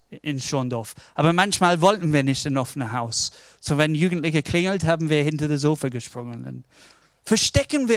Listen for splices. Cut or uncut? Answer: uncut